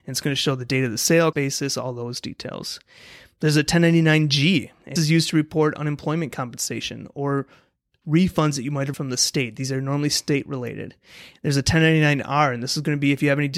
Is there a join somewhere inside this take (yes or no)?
yes